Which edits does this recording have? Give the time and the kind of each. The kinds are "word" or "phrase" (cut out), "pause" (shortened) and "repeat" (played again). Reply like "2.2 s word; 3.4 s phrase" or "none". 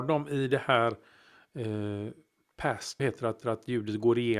3.0 s word; 3.4 s repeat